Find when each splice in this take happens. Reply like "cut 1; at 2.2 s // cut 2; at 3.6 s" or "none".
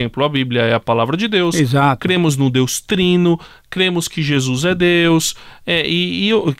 none